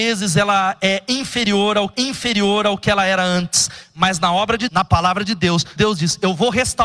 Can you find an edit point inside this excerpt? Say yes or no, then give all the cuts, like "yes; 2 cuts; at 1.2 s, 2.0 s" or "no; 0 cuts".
yes; 3 cuts; at 1.9 s, 4.7 s, 5.8 s